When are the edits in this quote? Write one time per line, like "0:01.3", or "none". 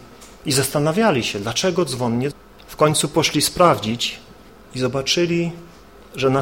none